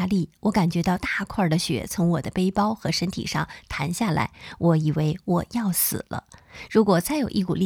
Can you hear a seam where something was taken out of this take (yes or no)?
no